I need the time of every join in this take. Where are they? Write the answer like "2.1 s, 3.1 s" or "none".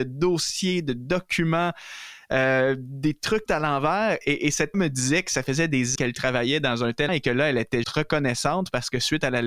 3.5 s, 4.7 s, 5.9 s, 7.1 s, 7.8 s

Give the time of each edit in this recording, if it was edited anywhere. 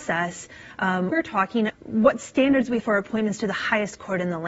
1.1 s, 1.7 s, 2.8 s

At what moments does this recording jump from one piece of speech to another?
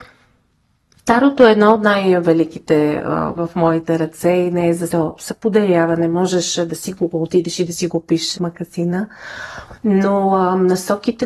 3.3 s, 4.9 s, 7.9 s, 8.3 s

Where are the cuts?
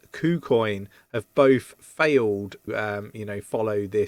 2.7 s

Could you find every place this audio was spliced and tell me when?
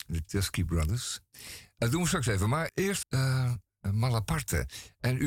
2.7 s, 3.0 s

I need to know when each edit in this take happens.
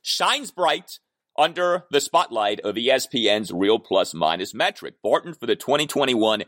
none

